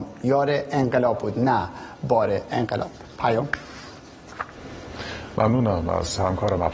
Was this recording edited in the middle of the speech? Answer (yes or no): no